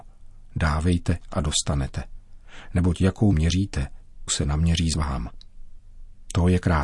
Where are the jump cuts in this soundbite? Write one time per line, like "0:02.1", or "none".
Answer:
0:03.3
0:04.3
0:04.9